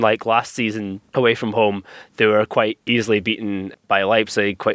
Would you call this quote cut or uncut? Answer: cut